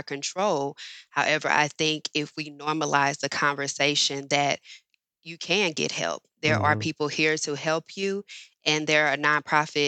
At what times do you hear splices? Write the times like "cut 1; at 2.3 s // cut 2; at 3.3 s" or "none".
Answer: none